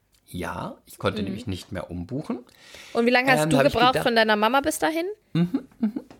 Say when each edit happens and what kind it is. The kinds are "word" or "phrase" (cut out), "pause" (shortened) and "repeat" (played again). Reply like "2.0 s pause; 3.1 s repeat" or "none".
5.2 s pause